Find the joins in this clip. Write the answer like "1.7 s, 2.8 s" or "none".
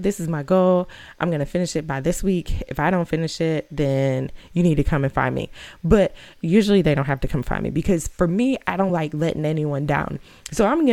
none